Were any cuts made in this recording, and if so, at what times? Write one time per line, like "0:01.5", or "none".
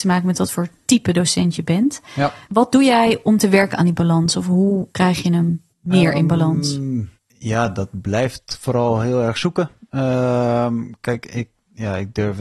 0:02.4
0:04.9
0:05.7
0:07.2